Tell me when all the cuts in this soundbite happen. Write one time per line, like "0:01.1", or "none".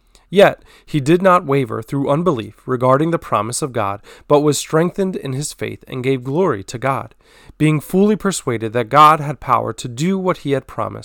none